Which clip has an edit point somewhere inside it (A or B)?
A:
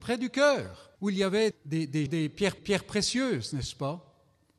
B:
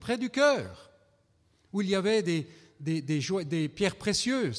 A